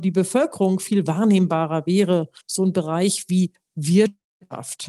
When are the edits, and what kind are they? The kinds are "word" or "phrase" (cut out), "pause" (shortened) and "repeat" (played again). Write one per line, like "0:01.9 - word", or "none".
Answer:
0:02.4 - pause